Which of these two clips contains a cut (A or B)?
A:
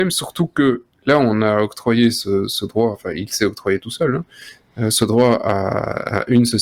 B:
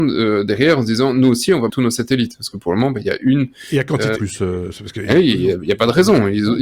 B